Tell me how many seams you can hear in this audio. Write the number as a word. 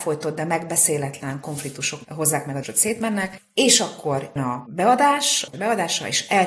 four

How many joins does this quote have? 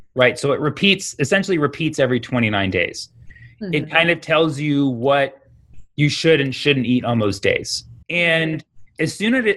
one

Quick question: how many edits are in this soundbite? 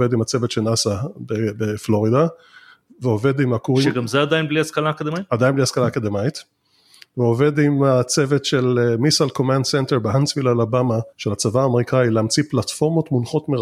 one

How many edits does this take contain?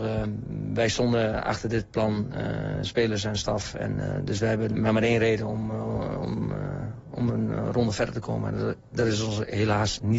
one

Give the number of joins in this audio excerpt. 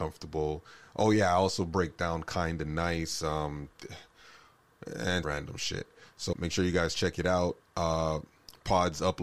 two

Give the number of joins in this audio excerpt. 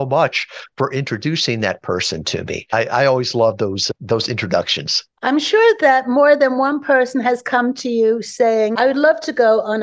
one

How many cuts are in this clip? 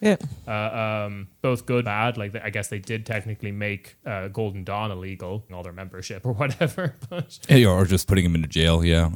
five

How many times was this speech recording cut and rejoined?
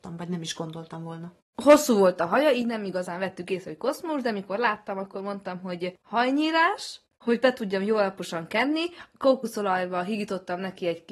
one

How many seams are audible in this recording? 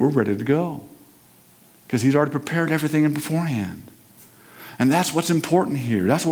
zero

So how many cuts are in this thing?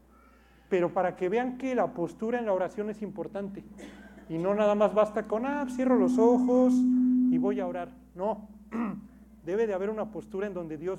zero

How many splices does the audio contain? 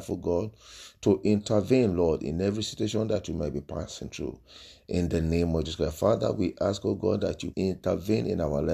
one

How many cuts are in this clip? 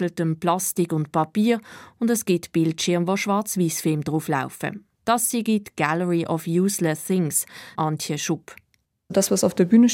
two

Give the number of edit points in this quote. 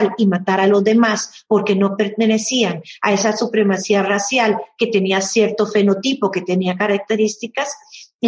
zero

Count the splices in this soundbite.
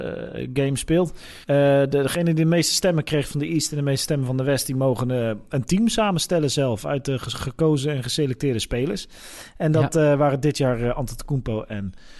one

